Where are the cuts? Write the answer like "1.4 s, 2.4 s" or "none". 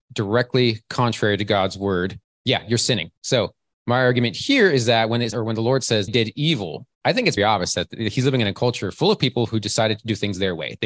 2.2 s, 3.2 s, 5.3 s, 6.1 s, 6.9 s, 7.4 s